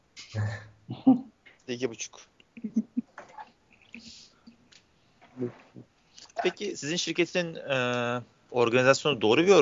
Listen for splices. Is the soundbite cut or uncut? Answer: cut